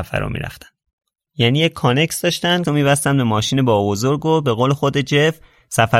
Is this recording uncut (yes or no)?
no